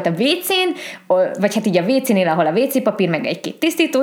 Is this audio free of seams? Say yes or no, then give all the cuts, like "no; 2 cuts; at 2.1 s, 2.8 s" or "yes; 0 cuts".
yes; 0 cuts